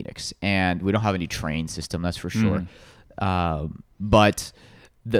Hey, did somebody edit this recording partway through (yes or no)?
no